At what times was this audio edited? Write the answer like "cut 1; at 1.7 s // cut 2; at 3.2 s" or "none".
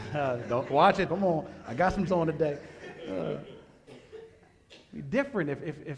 cut 1; at 1.1 s // cut 2; at 2.1 s